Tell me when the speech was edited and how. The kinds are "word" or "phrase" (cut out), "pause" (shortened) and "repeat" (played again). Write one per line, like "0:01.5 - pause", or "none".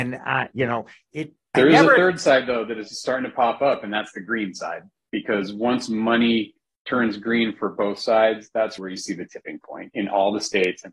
0:08.8 - word